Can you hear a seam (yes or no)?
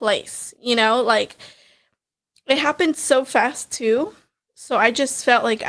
no